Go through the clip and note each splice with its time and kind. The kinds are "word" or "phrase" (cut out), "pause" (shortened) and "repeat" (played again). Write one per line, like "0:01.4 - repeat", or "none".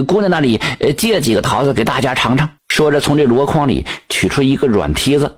0:02.6 - pause